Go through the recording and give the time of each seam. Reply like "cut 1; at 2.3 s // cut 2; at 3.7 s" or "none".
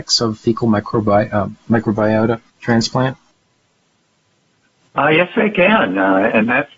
cut 1; at 2.5 s